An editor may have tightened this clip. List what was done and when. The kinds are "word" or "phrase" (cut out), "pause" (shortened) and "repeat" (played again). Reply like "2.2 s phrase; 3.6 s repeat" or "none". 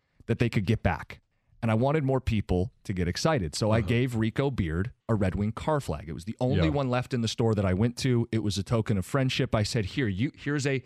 1.3 s pause; 5.0 s pause